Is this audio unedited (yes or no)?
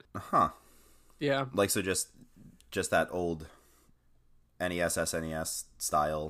yes